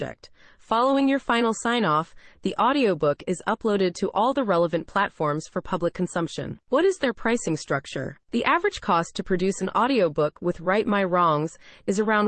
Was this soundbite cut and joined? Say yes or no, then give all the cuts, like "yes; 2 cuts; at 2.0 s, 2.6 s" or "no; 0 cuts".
no; 0 cuts